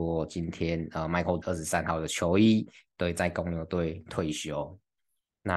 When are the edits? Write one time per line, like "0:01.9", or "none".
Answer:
0:01.4

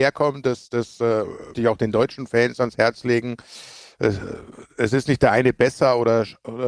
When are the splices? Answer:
0:01.5

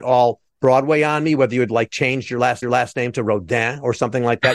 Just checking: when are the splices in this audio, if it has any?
0:02.6

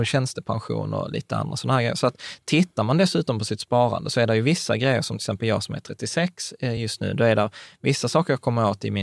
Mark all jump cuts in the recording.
none

